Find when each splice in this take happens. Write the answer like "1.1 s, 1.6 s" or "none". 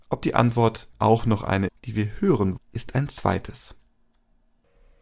0.9 s, 1.7 s, 2.6 s